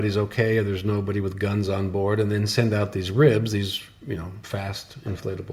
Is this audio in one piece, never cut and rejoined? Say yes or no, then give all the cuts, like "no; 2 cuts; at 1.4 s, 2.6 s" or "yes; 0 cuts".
yes; 0 cuts